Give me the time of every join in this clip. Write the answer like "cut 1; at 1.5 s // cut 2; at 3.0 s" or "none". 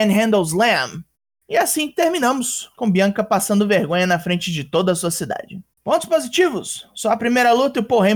cut 1; at 1.1 s // cut 2; at 2.7 s // cut 3; at 5.7 s